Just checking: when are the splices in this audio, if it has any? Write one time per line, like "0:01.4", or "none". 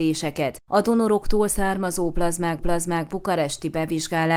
0:02.6

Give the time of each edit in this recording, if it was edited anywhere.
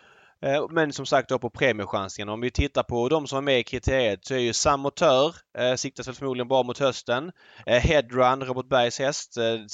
none

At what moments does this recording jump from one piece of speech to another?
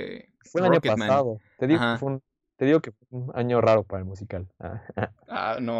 none

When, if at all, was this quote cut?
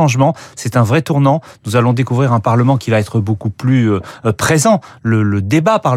none

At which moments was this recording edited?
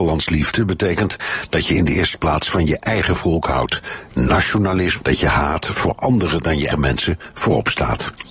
0:05.0
0:06.7

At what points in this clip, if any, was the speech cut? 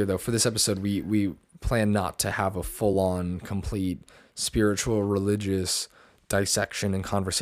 none

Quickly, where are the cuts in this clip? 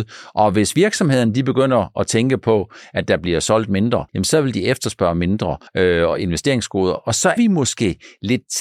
0:04.1
0:05.7
0:07.4

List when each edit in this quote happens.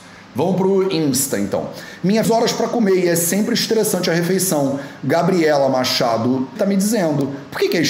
0:02.2
0:06.6

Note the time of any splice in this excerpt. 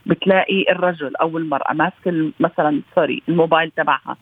none

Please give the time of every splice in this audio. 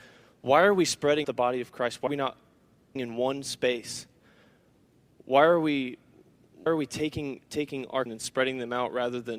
0:01.2
0:02.1
0:03.0
0:06.7
0:08.1

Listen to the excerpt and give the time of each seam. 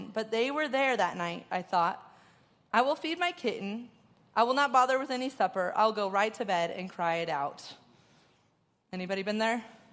none

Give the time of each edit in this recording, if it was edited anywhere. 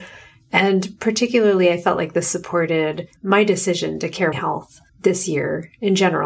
0:03.2
0:04.3
0:04.9

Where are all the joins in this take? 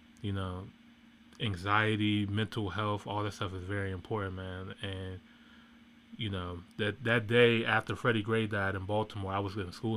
none

